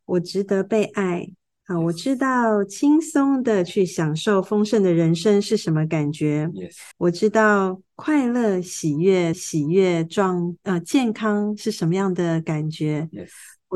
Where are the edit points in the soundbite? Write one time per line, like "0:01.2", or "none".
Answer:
0:06.9
0:09.3

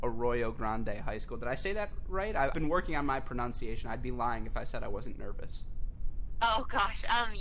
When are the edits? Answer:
0:02.5

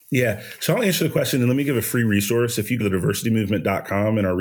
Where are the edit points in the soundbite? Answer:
0:02.8

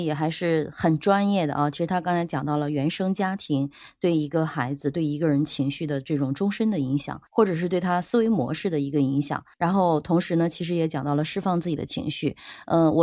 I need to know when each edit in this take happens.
0:07.3
0:09.5

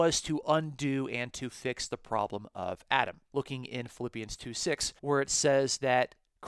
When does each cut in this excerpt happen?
0:03.3
0:05.0

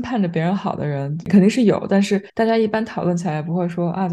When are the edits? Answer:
0:02.3

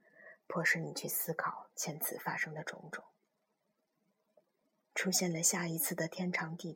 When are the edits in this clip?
none

